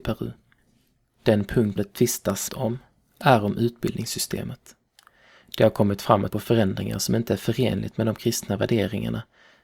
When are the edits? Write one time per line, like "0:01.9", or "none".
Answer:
0:01.8
0:02.5
0:06.3